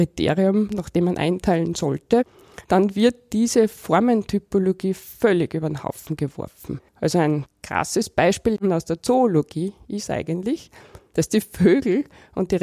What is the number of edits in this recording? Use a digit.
2